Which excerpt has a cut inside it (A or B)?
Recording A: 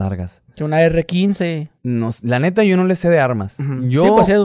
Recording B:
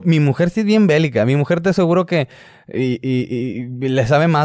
A